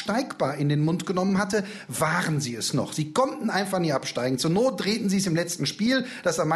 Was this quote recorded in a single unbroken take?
yes; 0 cuts

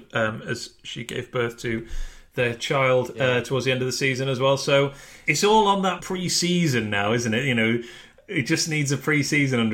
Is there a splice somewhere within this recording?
yes; 2 cuts; at 5.3 s, 6.0 s

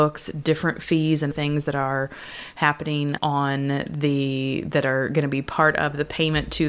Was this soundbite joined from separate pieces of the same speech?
yes; 2 cuts; at 1.3 s, 3.2 s

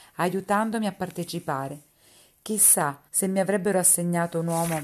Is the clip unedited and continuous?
no; 1 cut; at 3.1 s

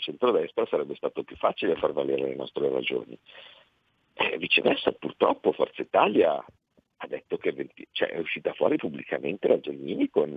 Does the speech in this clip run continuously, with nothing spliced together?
yes; 0 cuts

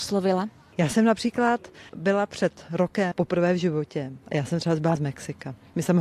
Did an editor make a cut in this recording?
yes; 2 cuts; at 3.1 s, 5.0 s

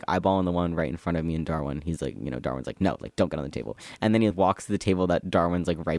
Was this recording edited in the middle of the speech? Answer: yes; 1 cut; at 4.3 s

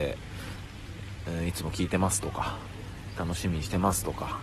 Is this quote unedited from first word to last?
no; 1 cut; at 3.1 s

